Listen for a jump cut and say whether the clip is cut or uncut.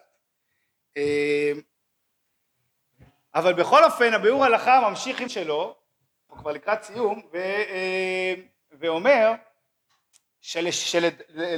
cut